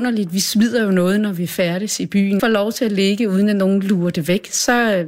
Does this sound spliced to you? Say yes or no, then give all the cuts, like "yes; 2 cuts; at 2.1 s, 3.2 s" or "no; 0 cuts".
yes; 1 cut; at 2.4 s